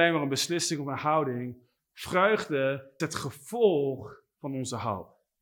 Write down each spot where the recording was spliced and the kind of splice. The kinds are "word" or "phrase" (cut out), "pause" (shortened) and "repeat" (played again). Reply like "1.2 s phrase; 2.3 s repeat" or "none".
3.0 s word